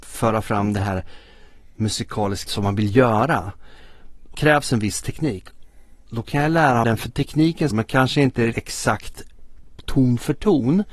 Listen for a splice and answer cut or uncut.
cut